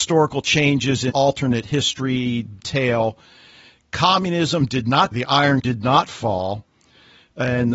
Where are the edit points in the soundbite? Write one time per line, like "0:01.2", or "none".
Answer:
0:01.1
0:02.6
0:05.1
0:05.6